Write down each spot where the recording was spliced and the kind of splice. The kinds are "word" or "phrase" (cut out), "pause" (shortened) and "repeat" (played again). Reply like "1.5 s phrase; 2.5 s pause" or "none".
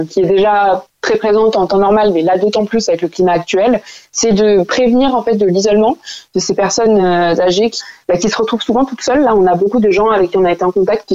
none